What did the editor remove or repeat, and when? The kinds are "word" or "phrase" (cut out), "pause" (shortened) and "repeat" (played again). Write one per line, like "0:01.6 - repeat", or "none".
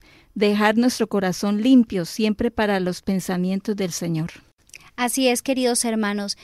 none